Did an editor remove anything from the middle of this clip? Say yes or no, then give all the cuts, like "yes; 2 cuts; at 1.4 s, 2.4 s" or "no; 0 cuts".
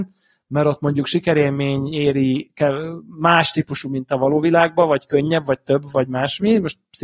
no; 0 cuts